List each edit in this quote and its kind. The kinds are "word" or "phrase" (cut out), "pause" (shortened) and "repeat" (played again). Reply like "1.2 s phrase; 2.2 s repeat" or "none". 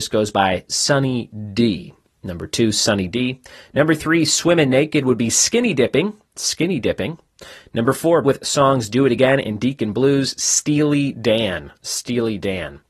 8.2 s word